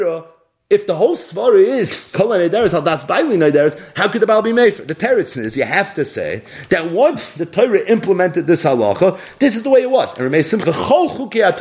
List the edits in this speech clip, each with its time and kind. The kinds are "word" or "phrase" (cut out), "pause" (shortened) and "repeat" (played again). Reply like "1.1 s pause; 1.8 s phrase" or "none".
10.6 s word